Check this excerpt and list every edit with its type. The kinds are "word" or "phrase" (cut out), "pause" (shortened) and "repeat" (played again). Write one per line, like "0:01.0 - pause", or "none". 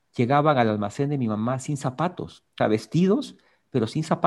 0:02.6 - word